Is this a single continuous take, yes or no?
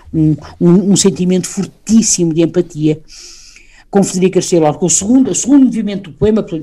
yes